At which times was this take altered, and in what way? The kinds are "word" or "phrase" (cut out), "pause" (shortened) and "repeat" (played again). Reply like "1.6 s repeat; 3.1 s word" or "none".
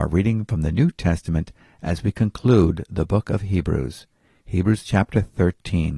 none